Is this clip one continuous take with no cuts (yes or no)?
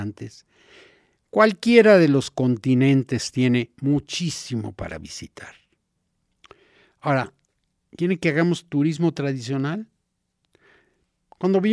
no